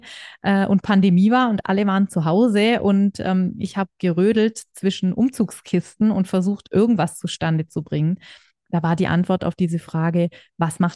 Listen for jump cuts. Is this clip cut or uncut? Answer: uncut